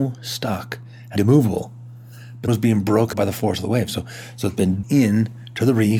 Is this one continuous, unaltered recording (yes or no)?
no